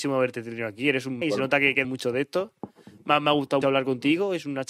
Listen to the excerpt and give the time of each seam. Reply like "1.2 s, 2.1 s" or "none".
1.2 s, 1.8 s, 3.6 s